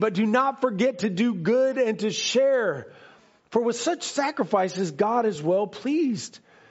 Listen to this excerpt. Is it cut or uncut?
uncut